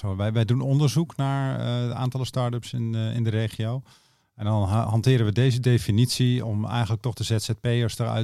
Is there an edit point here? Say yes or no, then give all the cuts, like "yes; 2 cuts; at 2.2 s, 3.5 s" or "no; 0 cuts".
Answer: no; 0 cuts